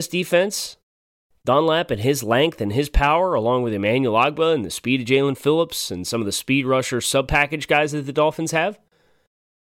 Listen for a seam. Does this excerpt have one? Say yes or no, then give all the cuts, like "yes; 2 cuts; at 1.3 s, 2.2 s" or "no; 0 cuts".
no; 0 cuts